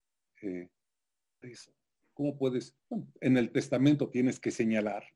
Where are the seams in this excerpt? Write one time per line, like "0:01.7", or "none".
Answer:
0:01.4
0:02.8